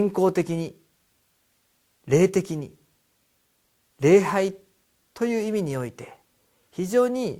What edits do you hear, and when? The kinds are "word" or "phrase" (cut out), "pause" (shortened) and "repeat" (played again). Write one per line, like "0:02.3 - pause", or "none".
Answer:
none